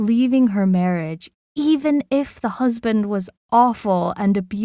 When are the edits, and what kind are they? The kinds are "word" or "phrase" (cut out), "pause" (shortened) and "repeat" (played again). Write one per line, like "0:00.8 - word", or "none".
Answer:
none